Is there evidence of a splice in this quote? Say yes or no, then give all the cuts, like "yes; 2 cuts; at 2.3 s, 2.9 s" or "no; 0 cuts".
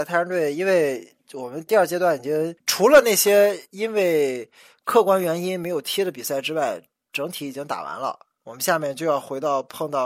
no; 0 cuts